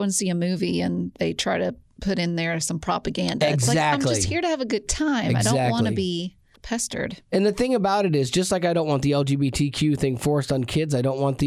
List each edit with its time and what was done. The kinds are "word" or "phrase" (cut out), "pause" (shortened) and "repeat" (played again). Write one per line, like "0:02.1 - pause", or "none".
0:06.6 - word